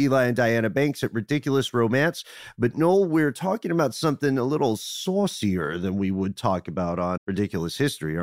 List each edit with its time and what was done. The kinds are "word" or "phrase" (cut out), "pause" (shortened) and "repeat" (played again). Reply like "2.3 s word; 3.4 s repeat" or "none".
7.2 s word